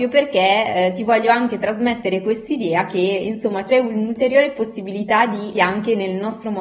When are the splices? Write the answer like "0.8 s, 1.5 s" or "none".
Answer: 3.7 s, 5.5 s